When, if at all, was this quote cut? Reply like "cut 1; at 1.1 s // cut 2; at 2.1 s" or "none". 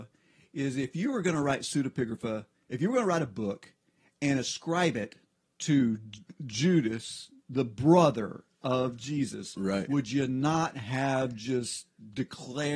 none